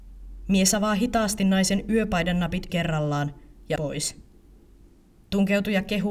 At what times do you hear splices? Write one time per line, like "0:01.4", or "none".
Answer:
0:02.7
0:03.8